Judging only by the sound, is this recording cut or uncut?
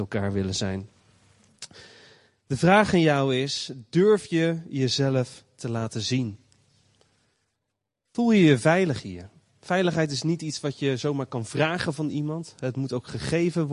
uncut